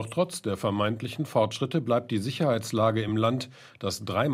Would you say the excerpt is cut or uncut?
uncut